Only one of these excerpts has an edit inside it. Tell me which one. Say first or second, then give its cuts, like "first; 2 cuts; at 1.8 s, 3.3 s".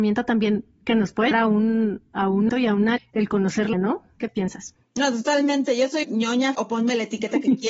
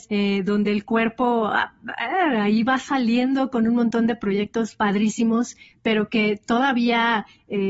first; 6 cuts; at 1.3 s, 2.5 s, 3.0 s, 3.7 s, 6.0 s, 6.5 s